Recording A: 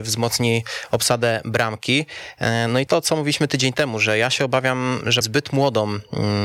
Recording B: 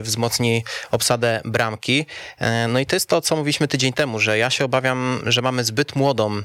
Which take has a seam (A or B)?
A